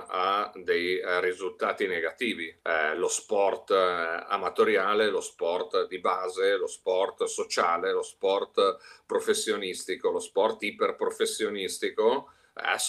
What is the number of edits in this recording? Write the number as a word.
one